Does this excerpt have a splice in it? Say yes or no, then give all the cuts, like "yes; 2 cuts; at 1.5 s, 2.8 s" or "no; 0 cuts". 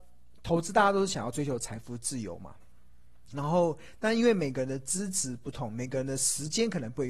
no; 0 cuts